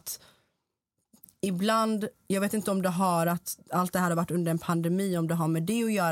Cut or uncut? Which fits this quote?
uncut